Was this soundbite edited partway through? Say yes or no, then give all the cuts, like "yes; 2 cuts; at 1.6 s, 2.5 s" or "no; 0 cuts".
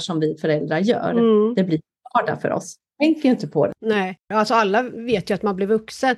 yes; 1 cut; at 3.8 s